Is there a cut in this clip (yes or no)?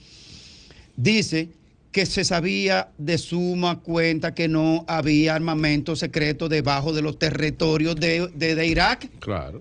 no